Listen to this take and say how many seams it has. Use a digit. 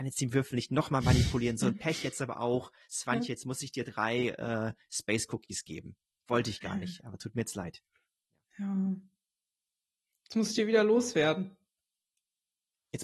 0